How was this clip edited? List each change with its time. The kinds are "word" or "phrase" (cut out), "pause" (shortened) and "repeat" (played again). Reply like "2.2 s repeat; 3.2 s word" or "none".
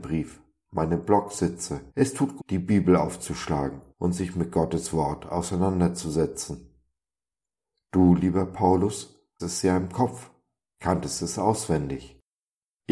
1.9 s pause; 2.4 s word; 3.9 s pause; 9.4 s word